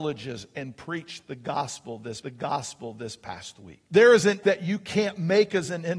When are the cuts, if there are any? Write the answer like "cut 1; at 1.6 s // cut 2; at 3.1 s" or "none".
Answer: cut 1; at 2.2 s // cut 2; at 3.8 s // cut 3; at 4.4 s